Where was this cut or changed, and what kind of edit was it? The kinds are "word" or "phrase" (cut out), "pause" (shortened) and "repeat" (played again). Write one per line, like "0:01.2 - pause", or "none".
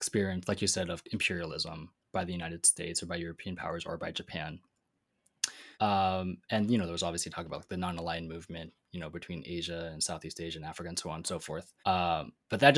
0:02.0 - pause
0:05.7 - pause
0:11.8 - pause

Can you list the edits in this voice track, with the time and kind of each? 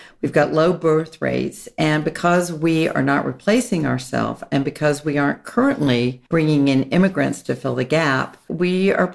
0:06.3 - pause

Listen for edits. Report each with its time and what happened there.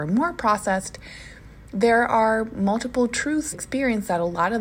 0:03.5 - phrase

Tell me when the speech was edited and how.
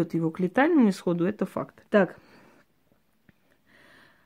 0:01.9 - pause

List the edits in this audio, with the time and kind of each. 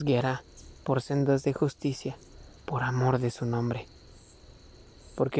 0:02.6 - pause

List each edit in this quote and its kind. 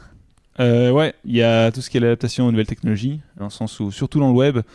0:03.4 - word

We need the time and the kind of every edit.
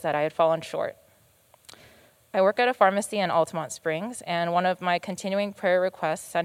none

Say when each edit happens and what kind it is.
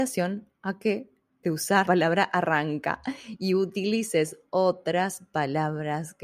0:01.4 - word
0:01.9 - word

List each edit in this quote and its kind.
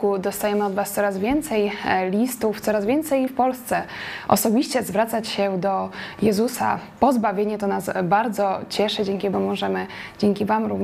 0:03.3 - word
0:09.3 - phrase

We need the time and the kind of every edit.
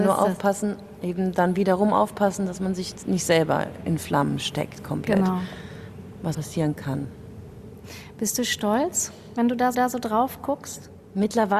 0:06.3 - word
0:09.7 - repeat

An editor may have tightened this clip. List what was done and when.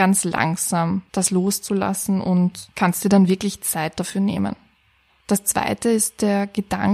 none

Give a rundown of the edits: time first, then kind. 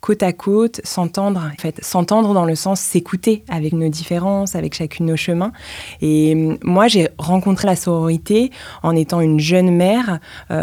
0:01.6 - phrase
0:03.7 - word
0:07.6 - word

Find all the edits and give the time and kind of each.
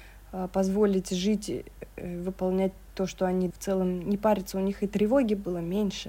0:03.5 - phrase

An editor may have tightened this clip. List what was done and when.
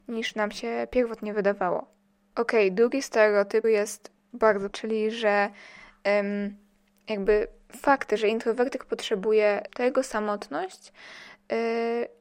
0:03.6 - word
0:04.7 - word
0:09.7 - word

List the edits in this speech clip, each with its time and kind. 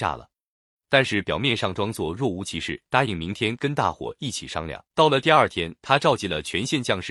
0:02.8 - pause
0:04.9 - pause
0:05.8 - pause

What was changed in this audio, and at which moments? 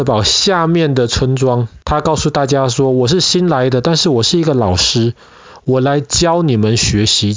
0:01.8 - pause

